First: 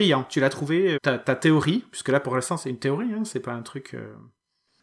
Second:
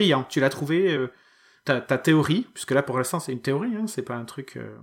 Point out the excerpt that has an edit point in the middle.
first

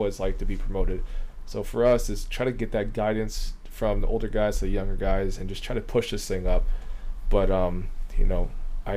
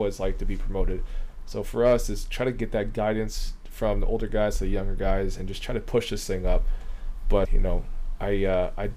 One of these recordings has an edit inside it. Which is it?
second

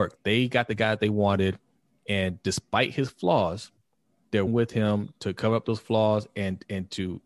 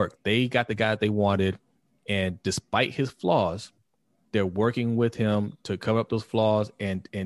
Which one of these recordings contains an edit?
first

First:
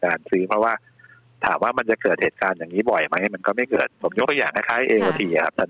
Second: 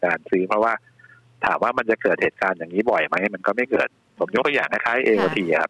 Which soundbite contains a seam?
first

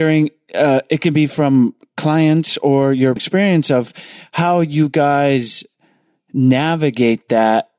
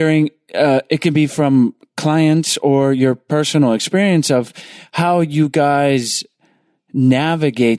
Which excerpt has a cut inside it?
first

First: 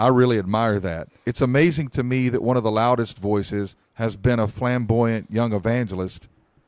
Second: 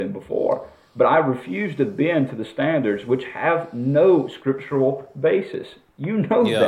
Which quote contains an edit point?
first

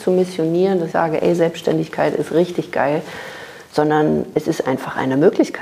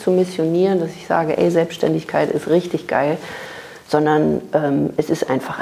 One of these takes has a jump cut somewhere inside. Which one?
first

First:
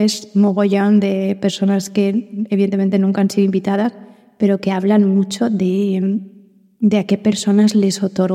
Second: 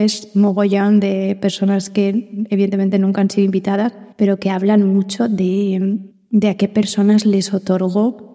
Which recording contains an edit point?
second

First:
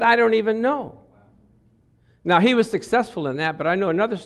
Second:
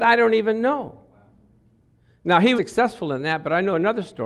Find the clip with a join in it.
second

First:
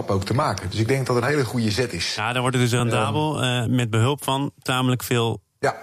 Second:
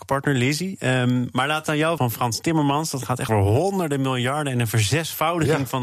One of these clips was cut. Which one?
second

